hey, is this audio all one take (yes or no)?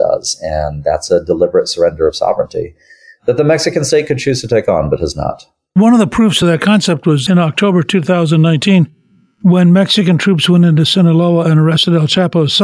yes